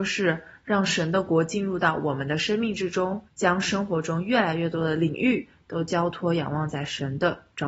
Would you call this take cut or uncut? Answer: cut